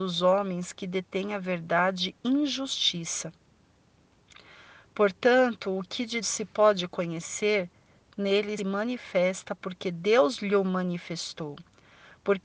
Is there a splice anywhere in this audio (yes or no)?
yes